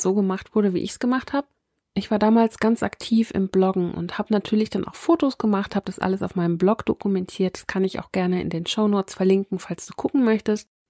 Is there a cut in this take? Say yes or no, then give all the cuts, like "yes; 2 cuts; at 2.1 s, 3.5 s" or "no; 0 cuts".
no; 0 cuts